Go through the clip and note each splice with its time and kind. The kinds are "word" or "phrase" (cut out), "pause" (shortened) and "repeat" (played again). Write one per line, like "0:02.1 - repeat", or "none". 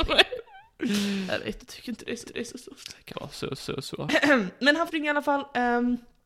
0:01.6 - word
0:02.2 - repeat
0:03.1 - word
0:03.6 - repeat
0:04.9 - word